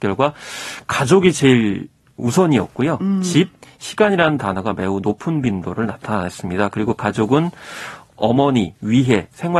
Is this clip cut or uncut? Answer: uncut